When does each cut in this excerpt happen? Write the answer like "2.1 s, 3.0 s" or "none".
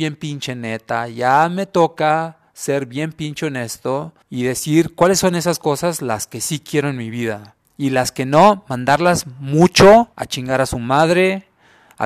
4.2 s, 7.7 s, 10.1 s